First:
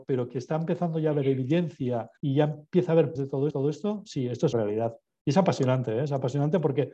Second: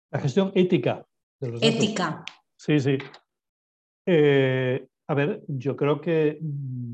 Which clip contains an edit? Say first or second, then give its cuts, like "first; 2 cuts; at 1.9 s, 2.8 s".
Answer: first; 4 cuts; at 2.2 s, 3.2 s, 3.5 s, 4.5 s